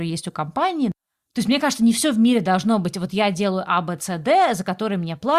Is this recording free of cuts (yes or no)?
yes